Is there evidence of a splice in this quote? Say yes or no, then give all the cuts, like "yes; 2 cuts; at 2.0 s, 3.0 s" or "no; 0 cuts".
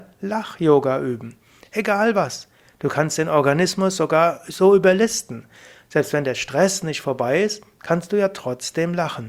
no; 0 cuts